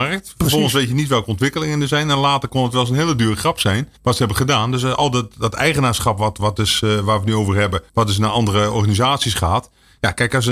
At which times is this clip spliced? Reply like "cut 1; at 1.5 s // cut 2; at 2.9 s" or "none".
cut 1; at 4.0 s // cut 2; at 7.9 s

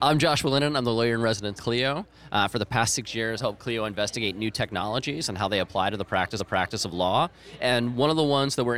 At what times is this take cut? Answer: cut 1; at 1.6 s // cut 2; at 3.4 s // cut 3; at 6.4 s

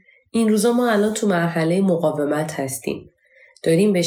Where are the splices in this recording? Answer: none

